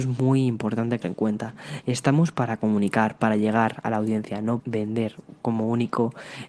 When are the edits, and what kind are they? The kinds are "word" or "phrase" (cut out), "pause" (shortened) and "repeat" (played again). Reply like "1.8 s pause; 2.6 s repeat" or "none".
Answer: 1.0 s phrase; 4.6 s word